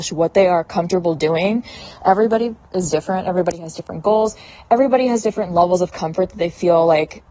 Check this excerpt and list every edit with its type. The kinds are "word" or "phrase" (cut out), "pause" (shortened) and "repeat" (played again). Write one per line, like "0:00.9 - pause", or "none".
none